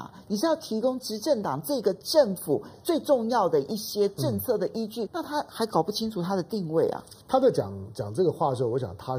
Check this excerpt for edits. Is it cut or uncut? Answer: cut